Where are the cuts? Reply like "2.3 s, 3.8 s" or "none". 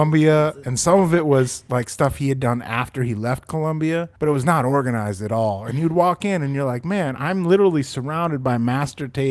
4.2 s